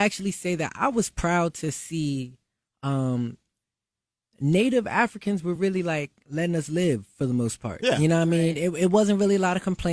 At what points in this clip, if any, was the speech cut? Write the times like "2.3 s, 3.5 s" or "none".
none